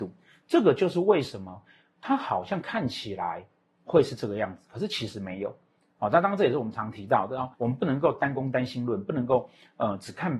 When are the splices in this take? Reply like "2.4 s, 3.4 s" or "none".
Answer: 7.5 s